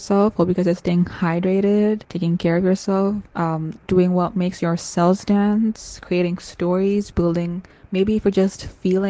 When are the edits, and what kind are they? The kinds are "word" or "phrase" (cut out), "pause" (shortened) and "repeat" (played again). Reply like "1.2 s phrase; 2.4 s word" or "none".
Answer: 2.0 s pause; 3.3 s pause